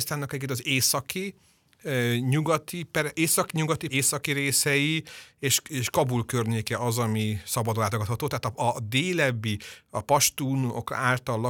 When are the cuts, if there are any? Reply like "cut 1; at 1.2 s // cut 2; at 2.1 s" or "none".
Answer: cut 1; at 3.9 s